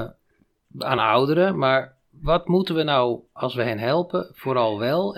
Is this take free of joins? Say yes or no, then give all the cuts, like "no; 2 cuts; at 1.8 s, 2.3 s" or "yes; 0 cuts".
yes; 0 cuts